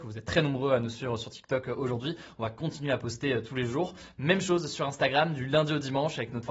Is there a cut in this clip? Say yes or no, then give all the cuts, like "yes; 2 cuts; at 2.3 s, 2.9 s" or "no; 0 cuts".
no; 0 cuts